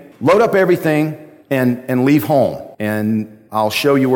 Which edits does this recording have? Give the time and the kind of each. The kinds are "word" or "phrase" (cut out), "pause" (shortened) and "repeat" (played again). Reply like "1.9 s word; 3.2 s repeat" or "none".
2.7 s pause